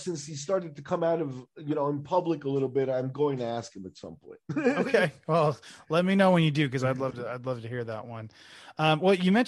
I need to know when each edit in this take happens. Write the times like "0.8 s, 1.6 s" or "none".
none